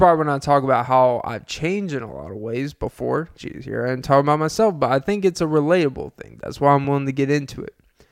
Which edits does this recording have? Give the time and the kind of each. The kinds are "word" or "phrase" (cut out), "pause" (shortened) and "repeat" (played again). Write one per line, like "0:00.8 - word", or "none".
none